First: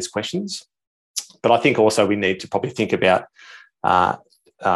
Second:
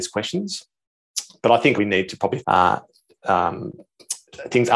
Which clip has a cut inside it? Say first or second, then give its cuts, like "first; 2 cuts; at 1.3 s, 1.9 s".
second; 2 cuts; at 1.8 s, 2.4 s